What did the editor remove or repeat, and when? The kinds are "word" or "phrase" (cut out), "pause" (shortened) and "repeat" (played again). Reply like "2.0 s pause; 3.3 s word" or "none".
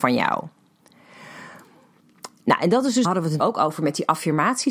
3.0 s phrase; 3.4 s word